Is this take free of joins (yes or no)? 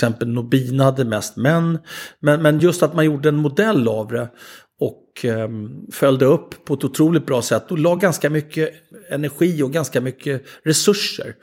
yes